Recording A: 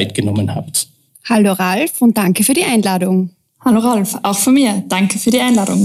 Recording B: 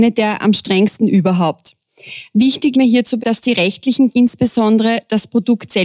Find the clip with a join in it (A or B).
B